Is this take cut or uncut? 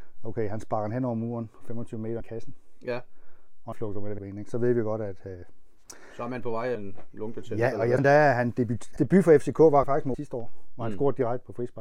cut